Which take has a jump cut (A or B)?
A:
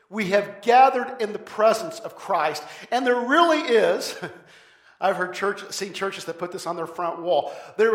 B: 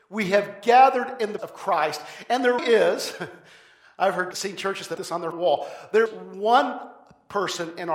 B